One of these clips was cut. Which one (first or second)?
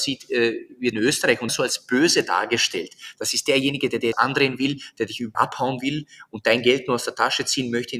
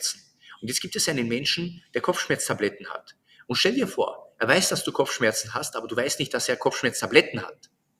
first